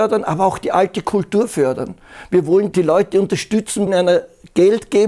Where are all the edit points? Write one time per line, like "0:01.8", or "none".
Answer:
0:02.7
0:03.9